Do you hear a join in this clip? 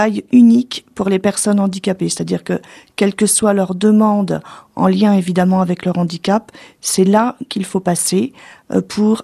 no; 0 cuts

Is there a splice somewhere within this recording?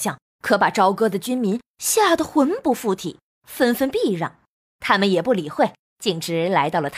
yes; 1 cut; at 4.6 s

